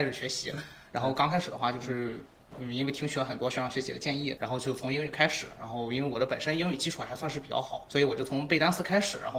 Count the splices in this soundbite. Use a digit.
2